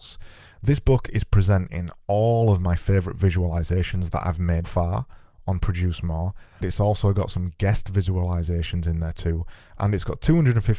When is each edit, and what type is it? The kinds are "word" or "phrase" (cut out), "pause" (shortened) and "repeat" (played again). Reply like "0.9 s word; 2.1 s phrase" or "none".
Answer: 4.6 s word; 6.6 s word